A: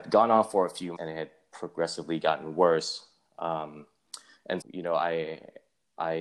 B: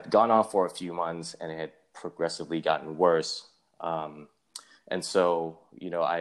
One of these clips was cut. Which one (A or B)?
A